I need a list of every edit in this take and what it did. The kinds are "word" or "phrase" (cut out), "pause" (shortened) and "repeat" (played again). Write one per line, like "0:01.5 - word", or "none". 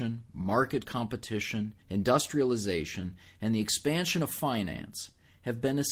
0:01.8 - pause